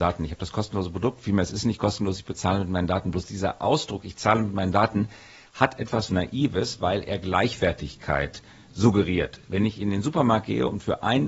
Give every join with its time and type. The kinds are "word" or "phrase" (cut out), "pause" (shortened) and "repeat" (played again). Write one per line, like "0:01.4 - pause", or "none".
0:06.1 - word

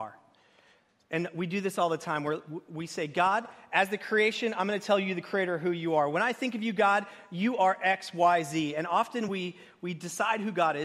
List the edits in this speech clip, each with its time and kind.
none

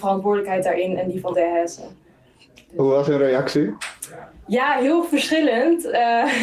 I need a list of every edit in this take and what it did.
0:01.3 - word

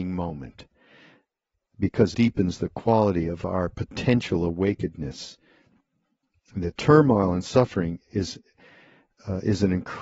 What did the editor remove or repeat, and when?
0:02.1 - word

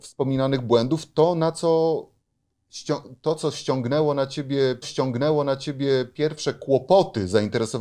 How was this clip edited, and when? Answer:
0:04.8 - repeat

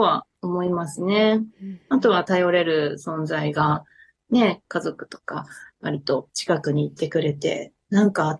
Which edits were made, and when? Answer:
0:05.7 - pause

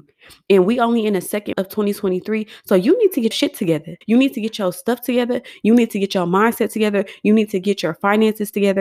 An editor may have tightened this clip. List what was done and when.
0:01.5 - word
0:03.3 - word
0:04.0 - pause

